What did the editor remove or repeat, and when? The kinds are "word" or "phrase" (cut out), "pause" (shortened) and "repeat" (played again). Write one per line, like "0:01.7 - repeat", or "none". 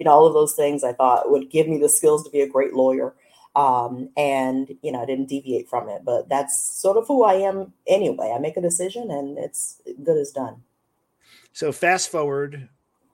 none